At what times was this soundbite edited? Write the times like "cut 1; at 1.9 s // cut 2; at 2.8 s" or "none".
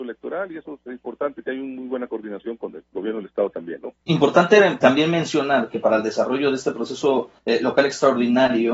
cut 1; at 4.0 s // cut 2; at 7.4 s